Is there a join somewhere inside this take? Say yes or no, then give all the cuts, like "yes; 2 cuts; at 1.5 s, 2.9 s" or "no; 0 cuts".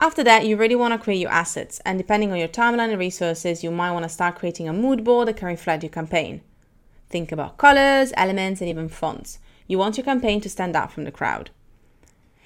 no; 0 cuts